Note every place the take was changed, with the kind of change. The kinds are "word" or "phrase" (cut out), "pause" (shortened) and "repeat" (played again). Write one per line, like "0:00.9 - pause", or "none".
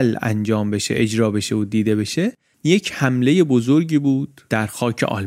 none